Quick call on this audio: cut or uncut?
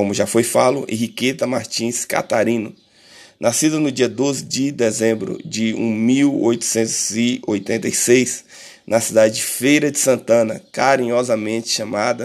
uncut